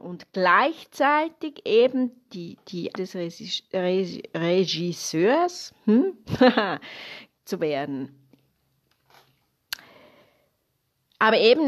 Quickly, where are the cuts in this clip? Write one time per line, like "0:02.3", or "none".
0:02.3
0:03.0
0:07.4